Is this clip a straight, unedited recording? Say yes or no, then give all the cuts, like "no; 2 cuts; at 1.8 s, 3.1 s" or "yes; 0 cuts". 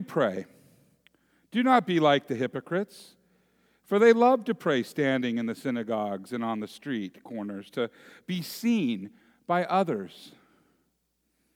yes; 0 cuts